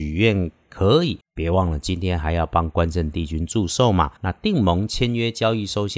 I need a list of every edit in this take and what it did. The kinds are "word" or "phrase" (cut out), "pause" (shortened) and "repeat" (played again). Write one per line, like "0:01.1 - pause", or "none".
0:01.2 - pause
0:04.2 - pause